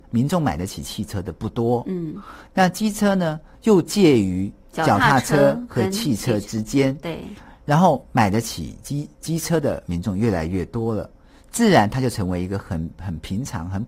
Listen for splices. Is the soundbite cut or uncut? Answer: uncut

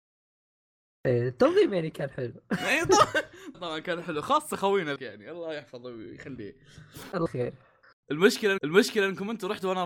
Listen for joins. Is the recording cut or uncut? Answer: cut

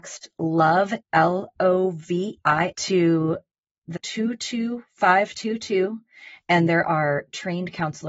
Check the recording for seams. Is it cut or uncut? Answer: cut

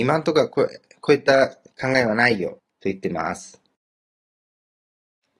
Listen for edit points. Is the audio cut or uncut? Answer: cut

